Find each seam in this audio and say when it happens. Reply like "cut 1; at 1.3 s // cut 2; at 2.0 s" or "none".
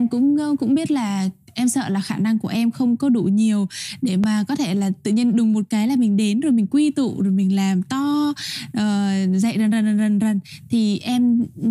none